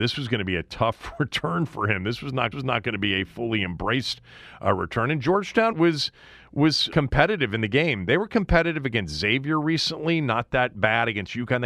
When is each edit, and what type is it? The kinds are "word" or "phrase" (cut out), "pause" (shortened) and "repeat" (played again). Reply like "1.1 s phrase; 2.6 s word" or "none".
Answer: 2.5 s repeat; 5.7 s word; 6.9 s word